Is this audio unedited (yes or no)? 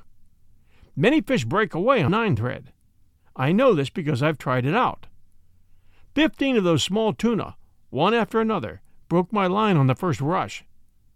no